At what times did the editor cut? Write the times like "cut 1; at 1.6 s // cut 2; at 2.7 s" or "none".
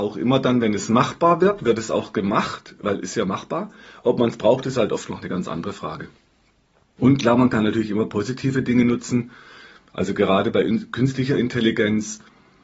none